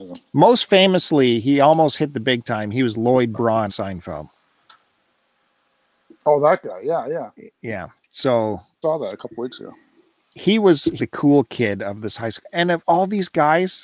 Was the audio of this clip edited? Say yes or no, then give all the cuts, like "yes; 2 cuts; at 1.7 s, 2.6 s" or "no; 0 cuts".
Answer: yes; 4 cuts; at 3.7 s, 8.8 s, 11.0 s, 12.8 s